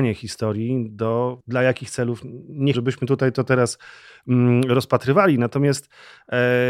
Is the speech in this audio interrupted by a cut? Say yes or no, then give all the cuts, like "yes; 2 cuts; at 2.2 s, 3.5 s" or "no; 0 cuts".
yes; 2 cuts; at 1.4 s, 2.7 s